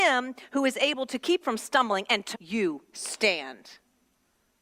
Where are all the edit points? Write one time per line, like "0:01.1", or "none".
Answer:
0:01.4
0:02.3